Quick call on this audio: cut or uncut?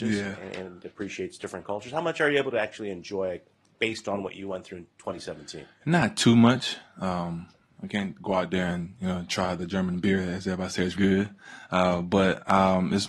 cut